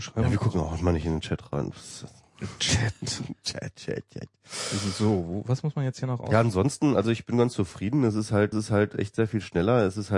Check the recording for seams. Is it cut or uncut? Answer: cut